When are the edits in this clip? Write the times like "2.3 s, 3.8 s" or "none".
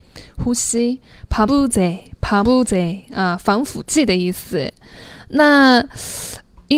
1.5 s, 2.4 s